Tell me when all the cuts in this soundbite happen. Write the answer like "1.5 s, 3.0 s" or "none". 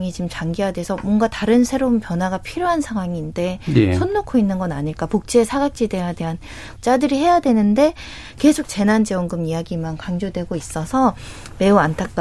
6.8 s